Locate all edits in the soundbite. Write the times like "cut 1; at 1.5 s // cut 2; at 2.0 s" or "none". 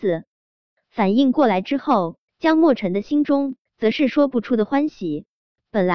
cut 1; at 2.3 s // cut 2; at 3.7 s